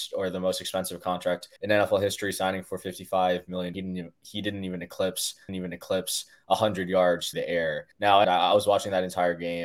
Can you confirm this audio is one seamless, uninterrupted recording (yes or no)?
no